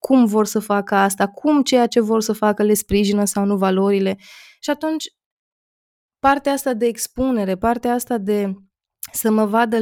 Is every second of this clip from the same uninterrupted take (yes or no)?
yes